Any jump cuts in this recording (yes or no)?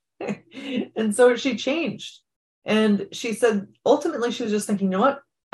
no